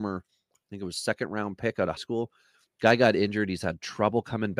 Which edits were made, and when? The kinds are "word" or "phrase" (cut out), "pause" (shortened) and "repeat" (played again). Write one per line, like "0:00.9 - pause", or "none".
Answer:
0:02.0 - word